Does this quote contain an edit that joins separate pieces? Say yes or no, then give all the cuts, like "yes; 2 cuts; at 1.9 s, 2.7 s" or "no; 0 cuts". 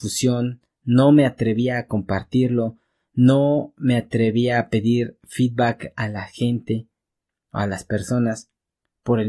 no; 0 cuts